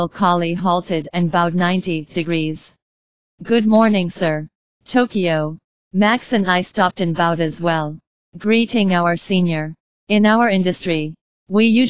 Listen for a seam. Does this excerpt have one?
no; 0 cuts

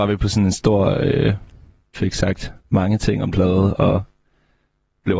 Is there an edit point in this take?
yes; 3 cuts; at 1.9 s, 2.6 s, 3.3 s

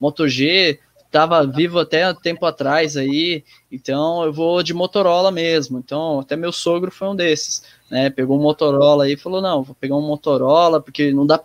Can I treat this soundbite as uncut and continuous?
yes; 0 cuts

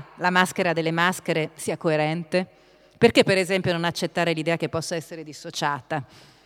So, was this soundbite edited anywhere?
no; 0 cuts

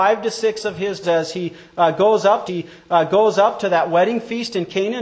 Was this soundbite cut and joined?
yes; 2 cuts; at 1.0 s, 2.5 s

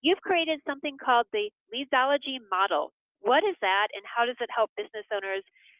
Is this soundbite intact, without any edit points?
yes; 0 cuts

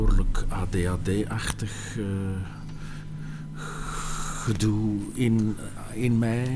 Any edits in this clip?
no; 0 cuts

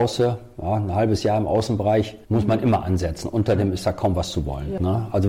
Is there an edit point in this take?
yes; 1 cut; at 2.2 s

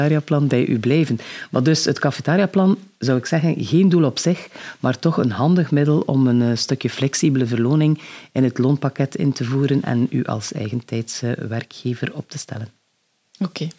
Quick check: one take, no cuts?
yes; 0 cuts

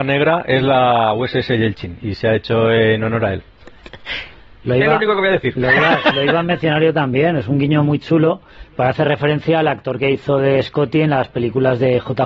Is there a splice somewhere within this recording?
no; 0 cuts

